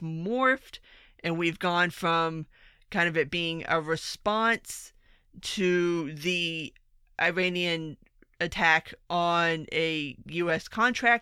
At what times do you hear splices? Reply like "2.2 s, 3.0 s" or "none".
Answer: none